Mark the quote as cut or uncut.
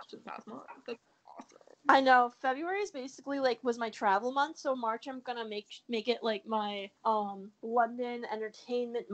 uncut